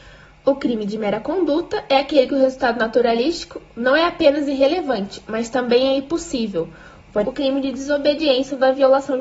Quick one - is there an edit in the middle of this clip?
yes; 1 cut; at 7.2 s

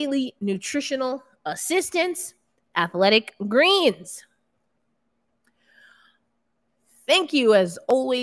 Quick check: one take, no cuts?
yes; 0 cuts

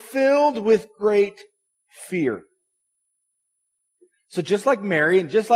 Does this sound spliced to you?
no; 0 cuts

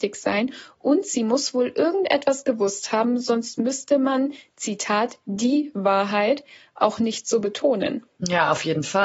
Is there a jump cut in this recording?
no; 0 cuts

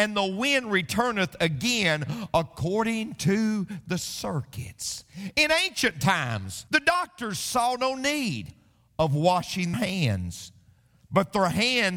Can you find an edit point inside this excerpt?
yes; 2 cuts; at 6.7 s, 9.7 s

